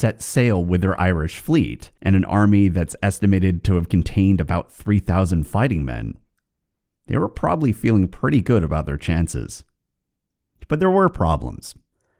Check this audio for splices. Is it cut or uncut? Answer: cut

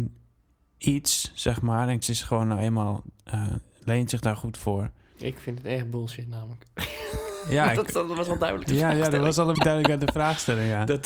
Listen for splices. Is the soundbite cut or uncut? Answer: cut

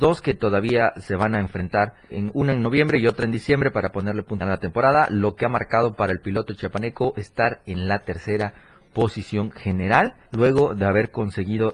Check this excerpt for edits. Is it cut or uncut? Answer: cut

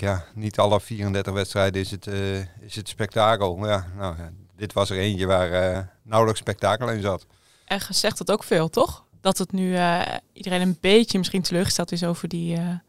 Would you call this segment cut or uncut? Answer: uncut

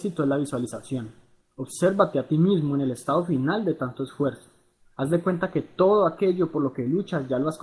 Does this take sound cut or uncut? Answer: uncut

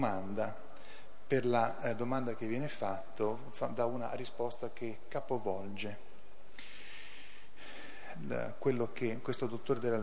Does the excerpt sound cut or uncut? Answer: uncut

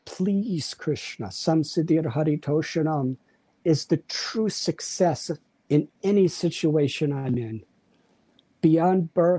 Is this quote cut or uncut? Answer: uncut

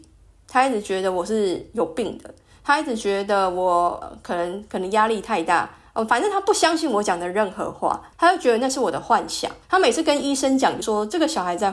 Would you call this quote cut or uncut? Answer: cut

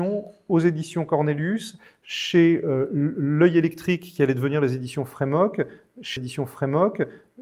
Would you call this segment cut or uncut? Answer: cut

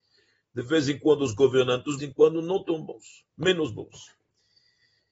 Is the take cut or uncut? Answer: cut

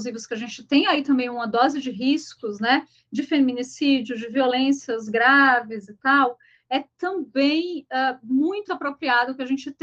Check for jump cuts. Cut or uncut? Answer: cut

